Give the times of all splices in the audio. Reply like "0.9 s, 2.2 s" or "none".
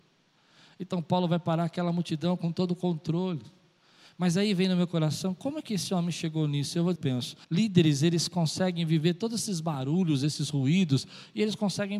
7.0 s, 7.4 s